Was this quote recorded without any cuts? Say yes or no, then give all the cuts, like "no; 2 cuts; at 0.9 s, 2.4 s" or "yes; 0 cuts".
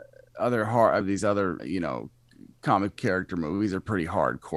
no; 3 cuts; at 1.0 s, 1.6 s, 3.0 s